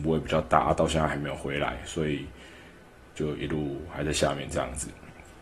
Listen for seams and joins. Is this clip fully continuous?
yes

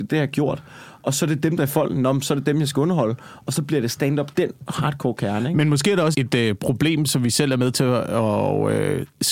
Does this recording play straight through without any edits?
no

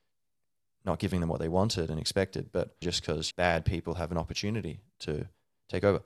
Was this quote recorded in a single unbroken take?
no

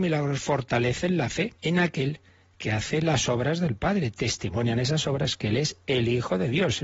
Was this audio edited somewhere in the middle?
yes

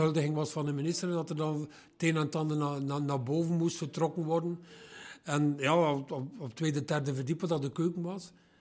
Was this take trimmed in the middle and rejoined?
no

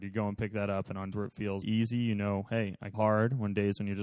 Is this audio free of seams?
no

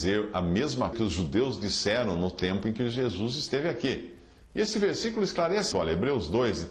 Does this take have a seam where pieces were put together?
yes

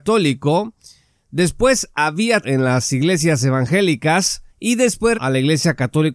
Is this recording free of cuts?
no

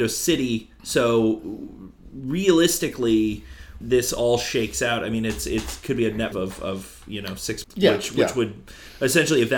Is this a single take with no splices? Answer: no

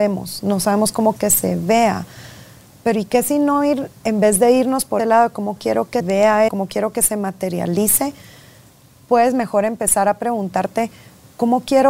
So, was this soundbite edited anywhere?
yes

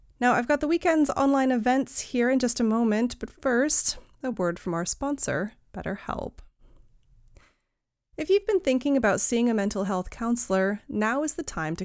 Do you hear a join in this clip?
no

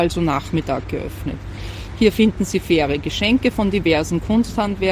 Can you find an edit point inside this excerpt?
no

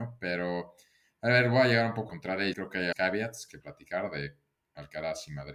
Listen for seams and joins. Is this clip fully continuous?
no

